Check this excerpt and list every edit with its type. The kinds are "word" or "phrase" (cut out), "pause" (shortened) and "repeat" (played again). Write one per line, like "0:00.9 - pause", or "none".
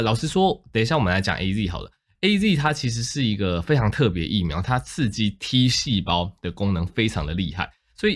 none